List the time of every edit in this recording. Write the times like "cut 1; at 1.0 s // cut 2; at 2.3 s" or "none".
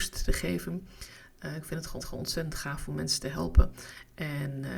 cut 1; at 2.0 s